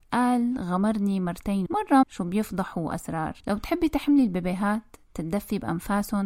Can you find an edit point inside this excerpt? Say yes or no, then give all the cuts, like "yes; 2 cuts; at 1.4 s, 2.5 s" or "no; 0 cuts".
yes; 3 cuts; at 1.7 s, 2.0 s, 3.4 s